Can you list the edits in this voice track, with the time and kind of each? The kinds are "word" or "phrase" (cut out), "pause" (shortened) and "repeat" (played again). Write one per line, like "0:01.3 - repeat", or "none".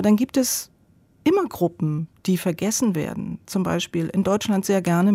none